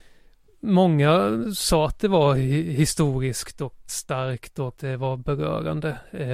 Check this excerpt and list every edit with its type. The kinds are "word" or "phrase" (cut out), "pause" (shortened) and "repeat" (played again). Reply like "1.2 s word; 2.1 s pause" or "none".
3.9 s word; 4.8 s word